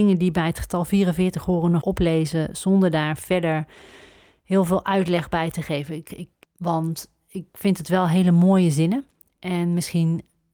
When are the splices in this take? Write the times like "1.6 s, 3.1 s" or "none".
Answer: 1.8 s, 6.4 s